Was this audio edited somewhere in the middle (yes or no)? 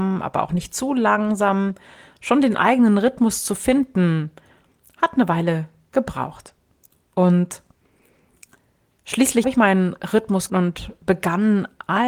yes